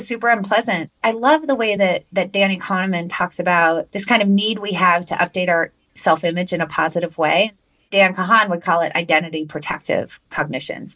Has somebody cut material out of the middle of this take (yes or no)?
no